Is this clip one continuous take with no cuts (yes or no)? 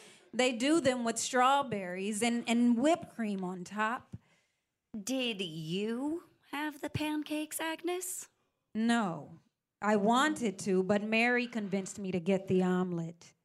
yes